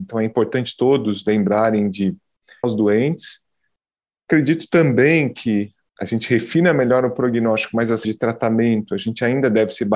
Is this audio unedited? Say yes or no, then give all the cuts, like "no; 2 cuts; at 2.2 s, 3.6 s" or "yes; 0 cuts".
no; 3 cuts; at 2.6 s, 5.9 s, 8.0 s